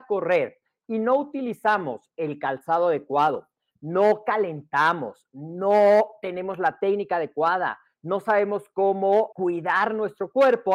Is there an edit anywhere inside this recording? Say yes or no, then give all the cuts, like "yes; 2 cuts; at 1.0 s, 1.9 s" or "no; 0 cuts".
yes; 1 cut; at 9.3 s